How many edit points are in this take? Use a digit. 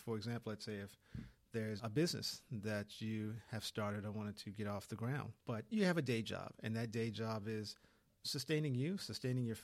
2